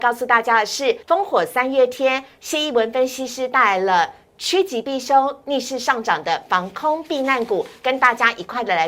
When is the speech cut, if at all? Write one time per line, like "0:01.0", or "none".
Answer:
0:01.0